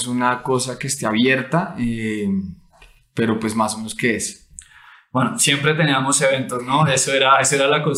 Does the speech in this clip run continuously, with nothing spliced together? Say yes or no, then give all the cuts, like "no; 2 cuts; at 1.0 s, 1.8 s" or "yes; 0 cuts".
yes; 0 cuts